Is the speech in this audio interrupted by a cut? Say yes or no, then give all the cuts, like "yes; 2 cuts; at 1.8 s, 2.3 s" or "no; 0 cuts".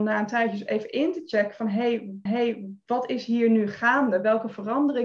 yes; 1 cut; at 2.3 s